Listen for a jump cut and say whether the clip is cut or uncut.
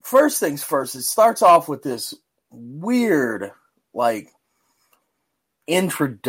uncut